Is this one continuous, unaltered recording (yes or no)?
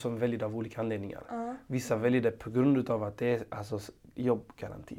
yes